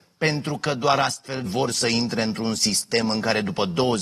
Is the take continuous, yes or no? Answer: no